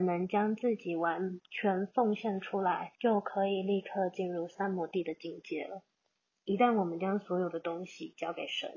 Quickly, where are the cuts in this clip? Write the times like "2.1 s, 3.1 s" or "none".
2.9 s